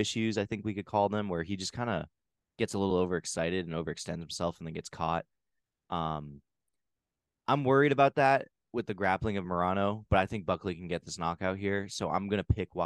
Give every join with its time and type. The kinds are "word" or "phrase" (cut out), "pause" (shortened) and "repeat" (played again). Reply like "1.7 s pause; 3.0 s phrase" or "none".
none

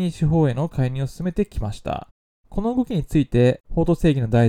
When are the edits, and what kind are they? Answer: none

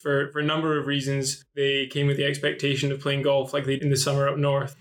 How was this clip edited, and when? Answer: 3.8 s word

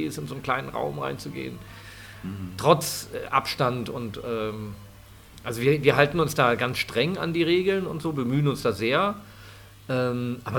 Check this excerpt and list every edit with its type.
none

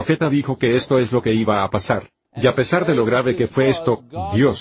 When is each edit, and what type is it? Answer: 2.2 s pause

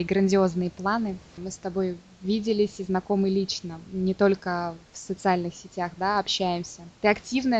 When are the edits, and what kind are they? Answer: none

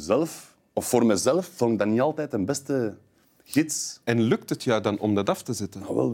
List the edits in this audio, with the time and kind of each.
none

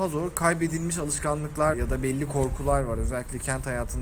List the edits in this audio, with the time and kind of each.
1.7 s word

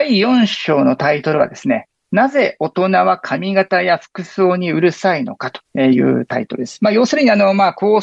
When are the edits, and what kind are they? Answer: 5.6 s pause

